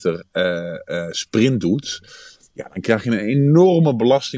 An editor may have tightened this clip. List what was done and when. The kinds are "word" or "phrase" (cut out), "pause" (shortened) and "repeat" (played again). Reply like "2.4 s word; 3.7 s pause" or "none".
none